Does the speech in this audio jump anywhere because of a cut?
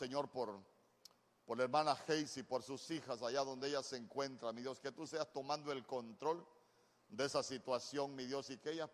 no; 0 cuts

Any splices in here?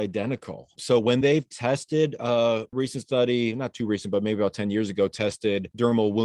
no; 0 cuts

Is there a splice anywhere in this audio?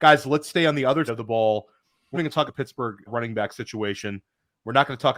yes; 4 cuts; at 1.1 s, 2.1 s, 2.5 s, 3.1 s

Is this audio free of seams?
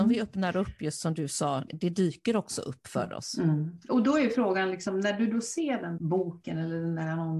no; 2 cuts; at 1.7 s, 6.0 s

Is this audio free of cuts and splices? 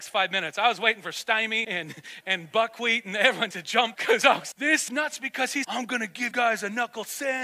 no; 8 cuts; at 1.6 s, 2.2 s, 3.5 s, 3.9 s, 4.5 s, 4.9 s, 5.6 s, 6.3 s

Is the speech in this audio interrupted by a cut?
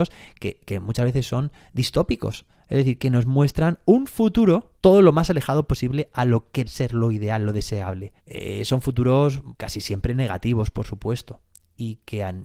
yes; 4 cuts; at 4.8 s, 6.6 s, 8.2 s, 9.5 s

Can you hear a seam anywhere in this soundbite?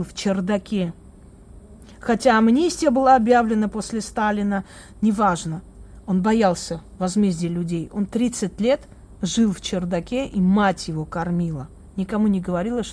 no; 0 cuts

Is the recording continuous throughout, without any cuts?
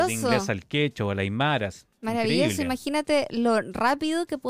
yes; 0 cuts

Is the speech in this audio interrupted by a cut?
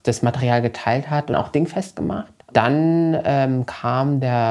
yes; 2 cuts; at 1.3 s, 2.4 s

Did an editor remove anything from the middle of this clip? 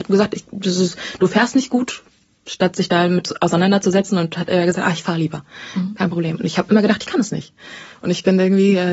no; 0 cuts

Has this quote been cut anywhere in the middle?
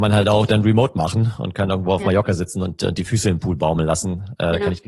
no; 0 cuts

